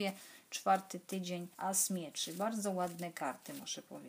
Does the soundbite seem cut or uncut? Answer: cut